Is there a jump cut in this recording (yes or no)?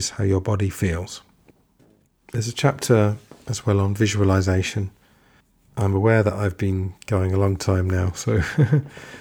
no